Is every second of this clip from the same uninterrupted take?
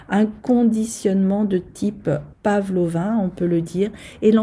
no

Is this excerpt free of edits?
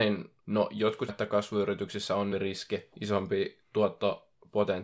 no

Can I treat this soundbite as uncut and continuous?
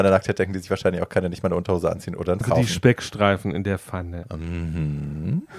no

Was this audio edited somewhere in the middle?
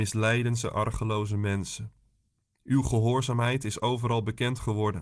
no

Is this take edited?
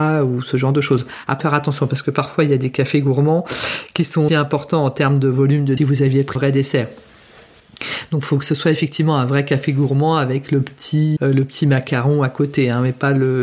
yes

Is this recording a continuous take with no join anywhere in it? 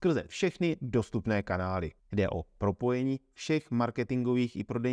no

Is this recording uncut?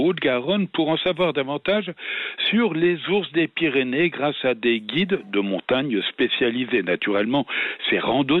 yes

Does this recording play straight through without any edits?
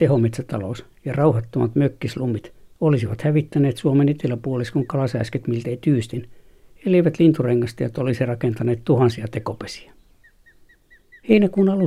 yes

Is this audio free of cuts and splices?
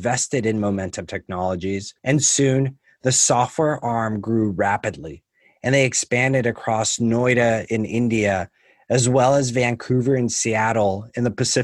no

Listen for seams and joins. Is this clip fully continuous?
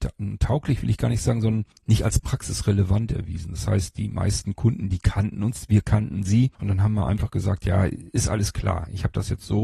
no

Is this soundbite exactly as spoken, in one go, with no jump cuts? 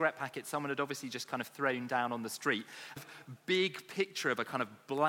no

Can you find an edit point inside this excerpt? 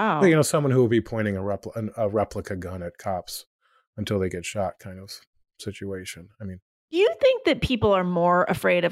no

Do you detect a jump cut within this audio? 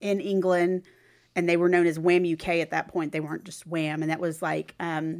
no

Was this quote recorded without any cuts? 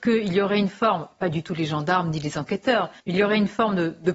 no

